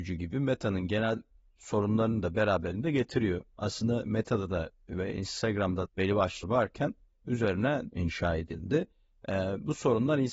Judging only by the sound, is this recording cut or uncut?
cut